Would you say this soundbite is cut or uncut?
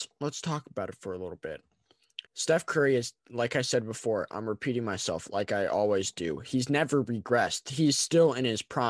cut